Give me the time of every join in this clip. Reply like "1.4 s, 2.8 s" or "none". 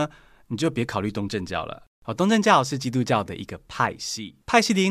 1.9 s